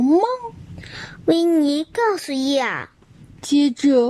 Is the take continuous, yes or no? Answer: yes